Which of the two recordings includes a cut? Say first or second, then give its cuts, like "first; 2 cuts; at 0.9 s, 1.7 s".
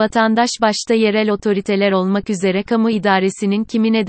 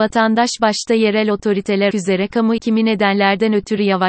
second; 2 cuts; at 1.9 s, 2.6 s